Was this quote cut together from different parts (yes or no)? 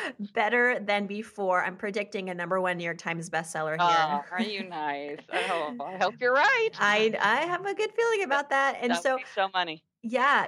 no